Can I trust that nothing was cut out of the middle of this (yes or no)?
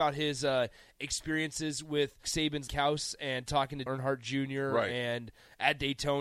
no